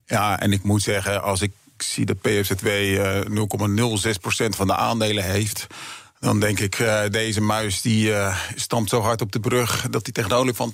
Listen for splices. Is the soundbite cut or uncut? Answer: uncut